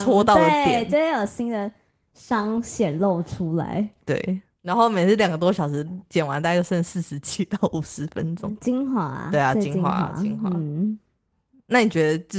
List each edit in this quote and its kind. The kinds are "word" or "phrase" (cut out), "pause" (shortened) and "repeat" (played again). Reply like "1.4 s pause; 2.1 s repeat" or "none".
4.5 s pause